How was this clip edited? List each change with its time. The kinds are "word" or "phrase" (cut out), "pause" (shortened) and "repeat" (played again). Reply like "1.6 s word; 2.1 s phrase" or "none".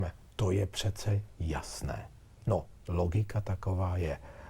none